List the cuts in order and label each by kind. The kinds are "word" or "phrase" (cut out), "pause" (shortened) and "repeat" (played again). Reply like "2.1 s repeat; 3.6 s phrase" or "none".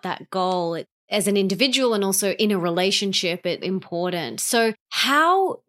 3.6 s word